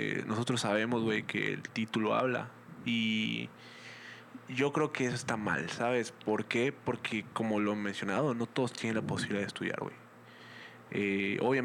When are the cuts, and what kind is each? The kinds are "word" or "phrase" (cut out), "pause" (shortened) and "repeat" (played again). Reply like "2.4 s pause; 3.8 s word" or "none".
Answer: none